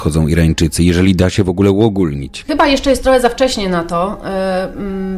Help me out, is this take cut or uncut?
uncut